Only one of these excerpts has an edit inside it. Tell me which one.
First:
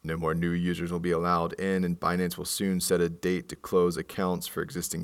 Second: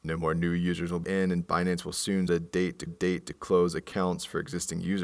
second; 3 cuts; at 1.0 s, 2.3 s, 2.9 s

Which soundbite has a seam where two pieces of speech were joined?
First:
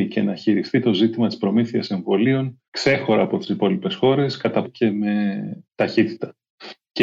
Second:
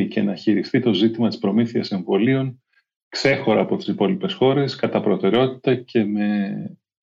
first; 3 cuts; at 2.6 s, 4.6 s, 5.6 s

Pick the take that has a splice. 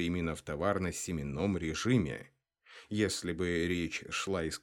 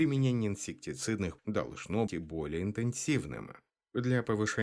second; 2 cuts; at 1.4 s, 2.1 s

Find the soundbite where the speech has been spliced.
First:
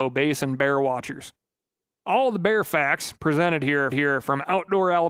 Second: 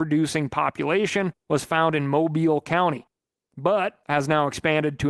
first; 1 cut; at 3.9 s

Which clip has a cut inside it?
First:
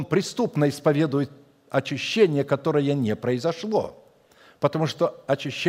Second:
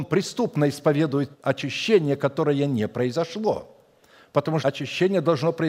second; 2 cuts; at 1.3 s, 4.6 s

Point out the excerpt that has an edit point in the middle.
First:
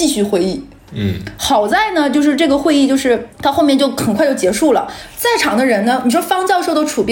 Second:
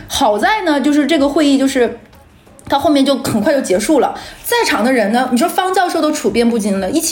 first; 1 cut; at 3.3 s

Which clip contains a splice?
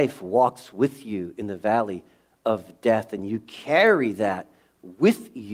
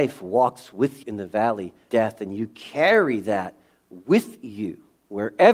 second; 2 cuts; at 1.0 s, 1.9 s

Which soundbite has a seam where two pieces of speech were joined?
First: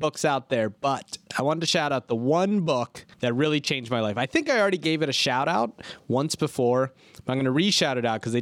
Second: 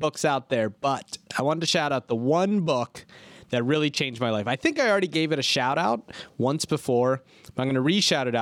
first; 1 cut; at 3.1 s

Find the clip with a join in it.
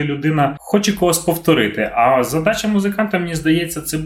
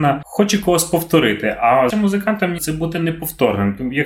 second; 2 cuts; at 1.9 s, 2.6 s

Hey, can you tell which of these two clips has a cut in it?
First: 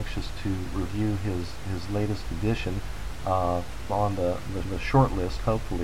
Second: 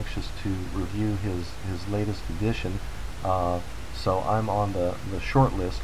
first; 2 cuts; at 3.9 s, 4.6 s

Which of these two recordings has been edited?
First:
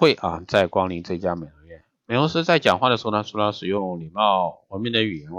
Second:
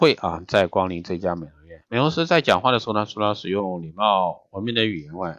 second; 1 cut; at 1.8 s

